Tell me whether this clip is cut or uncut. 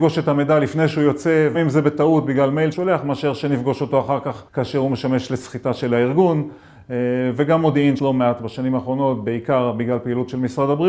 cut